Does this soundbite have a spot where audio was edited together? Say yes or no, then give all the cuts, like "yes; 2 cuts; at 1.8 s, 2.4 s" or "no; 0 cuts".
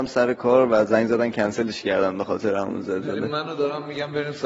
no; 0 cuts